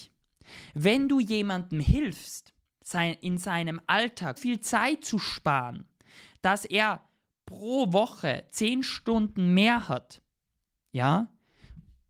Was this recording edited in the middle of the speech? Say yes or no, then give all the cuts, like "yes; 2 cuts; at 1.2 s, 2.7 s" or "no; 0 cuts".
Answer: yes; 1 cut; at 4.4 s